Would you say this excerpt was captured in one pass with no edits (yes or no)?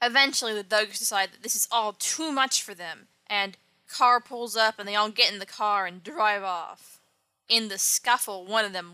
yes